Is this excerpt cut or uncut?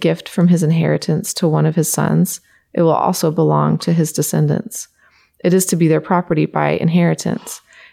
uncut